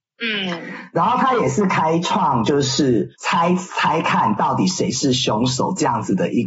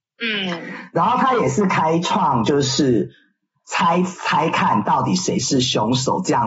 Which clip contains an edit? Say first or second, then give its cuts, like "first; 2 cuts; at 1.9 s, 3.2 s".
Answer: first; 1 cut; at 3.1 s